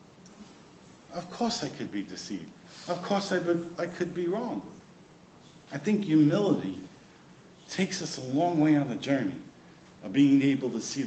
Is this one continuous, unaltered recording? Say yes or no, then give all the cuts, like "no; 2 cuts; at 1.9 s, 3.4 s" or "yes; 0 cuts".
yes; 0 cuts